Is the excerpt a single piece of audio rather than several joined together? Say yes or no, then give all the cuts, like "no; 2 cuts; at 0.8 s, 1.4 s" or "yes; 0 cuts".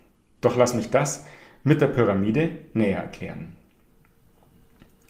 yes; 0 cuts